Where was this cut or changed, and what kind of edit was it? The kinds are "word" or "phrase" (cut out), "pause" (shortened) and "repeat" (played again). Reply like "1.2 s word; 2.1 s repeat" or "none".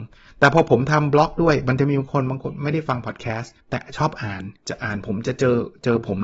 3.6 s pause; 4.6 s pause

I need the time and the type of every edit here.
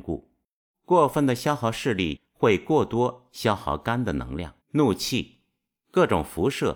4.6 s pause

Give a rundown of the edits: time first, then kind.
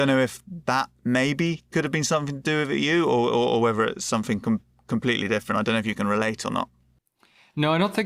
none

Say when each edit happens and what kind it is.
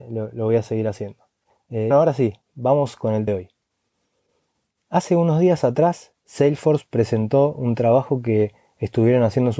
1.9 s word; 3.3 s word

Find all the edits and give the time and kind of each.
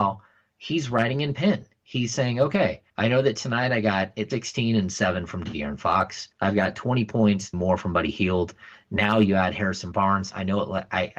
2.9 s pause; 4.3 s word; 6.3 s pause; 7.5 s word

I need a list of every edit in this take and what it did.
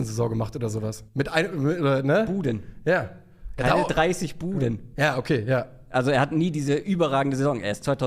1.1 s pause

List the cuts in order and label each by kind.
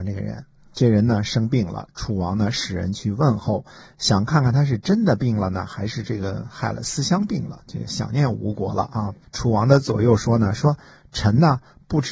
none

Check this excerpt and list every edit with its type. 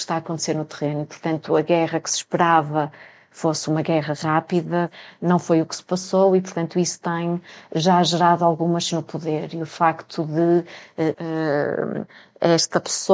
8.9 s word; 11.1 s word

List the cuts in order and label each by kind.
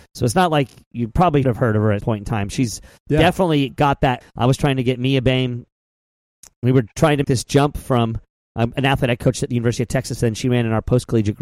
0.9 s word; 1.4 s word; 2.0 s word; 4.2 s phrase; 7.2 s word

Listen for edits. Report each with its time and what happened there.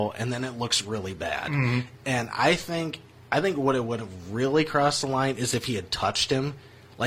3.1 s pause

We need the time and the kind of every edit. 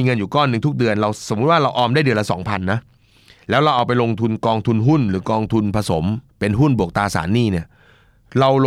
6.3 s pause

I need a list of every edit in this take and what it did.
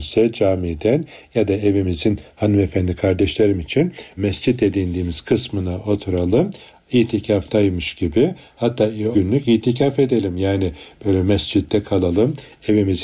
4.2 s word; 9.1 s word

